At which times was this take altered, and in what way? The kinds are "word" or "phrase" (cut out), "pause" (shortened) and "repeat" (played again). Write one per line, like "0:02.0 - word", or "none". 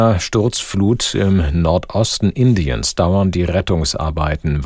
none